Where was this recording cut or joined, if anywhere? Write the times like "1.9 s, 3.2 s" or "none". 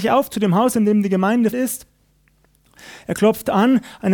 1.5 s